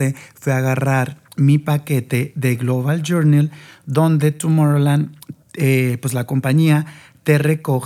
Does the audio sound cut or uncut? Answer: cut